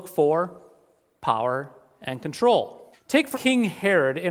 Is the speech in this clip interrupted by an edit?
yes; 2 cuts; at 2.9 s, 3.3 s

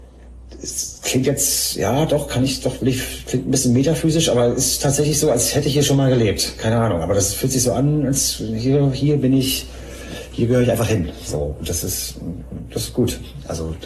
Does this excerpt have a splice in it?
no; 0 cuts

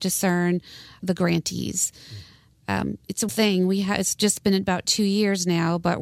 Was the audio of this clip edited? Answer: yes; 2 cuts; at 1.0 s, 3.3 s

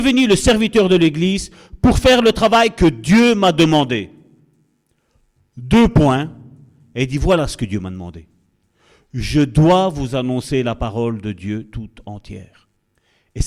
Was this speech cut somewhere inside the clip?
no; 0 cuts

